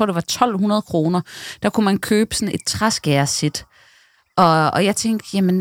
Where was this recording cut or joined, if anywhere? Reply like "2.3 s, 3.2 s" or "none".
none